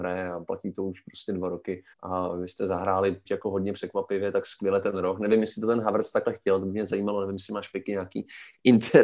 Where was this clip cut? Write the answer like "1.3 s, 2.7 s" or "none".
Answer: 1.9 s, 3.3 s